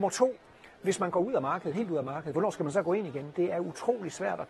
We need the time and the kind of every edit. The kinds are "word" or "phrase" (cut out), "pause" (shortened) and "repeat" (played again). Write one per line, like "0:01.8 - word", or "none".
none